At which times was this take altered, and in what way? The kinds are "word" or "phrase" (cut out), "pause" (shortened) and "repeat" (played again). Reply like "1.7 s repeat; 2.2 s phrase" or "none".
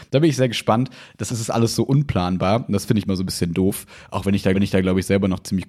1.3 s word; 3.1 s word; 4.5 s repeat